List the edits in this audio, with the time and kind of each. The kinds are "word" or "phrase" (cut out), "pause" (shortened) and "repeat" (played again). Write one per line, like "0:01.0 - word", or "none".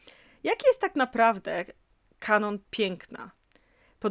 none